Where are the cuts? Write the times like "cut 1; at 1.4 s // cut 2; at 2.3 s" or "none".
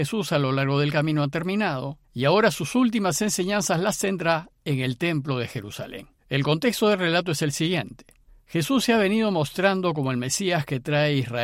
cut 1; at 2.0 s // cut 2; at 6.2 s // cut 3; at 8.3 s